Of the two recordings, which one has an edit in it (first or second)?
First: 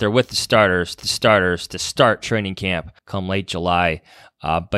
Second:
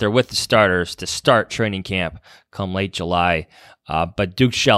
first